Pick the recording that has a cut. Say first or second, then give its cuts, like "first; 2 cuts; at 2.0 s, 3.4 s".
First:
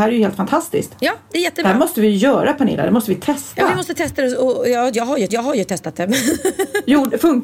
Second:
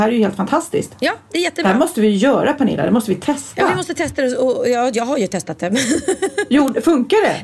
first; 1 cut; at 5.3 s